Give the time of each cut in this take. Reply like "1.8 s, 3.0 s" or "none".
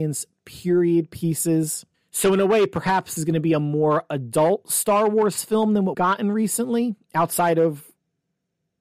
1.9 s, 3.2 s, 5.9 s